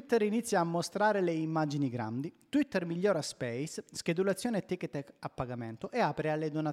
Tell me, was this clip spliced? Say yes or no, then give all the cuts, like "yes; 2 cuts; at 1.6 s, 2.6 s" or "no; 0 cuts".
no; 0 cuts